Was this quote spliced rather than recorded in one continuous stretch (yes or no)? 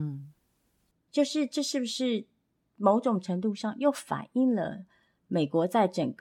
no